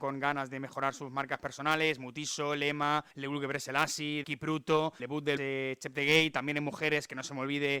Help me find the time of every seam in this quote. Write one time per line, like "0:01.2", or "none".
0:03.1
0:04.2
0:05.0
0:05.4